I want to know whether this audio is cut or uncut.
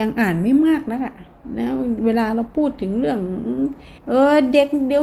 cut